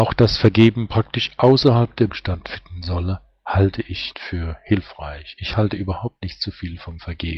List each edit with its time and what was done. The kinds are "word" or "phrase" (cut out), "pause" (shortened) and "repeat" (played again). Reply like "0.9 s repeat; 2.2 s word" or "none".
2.1 s word; 4.1 s word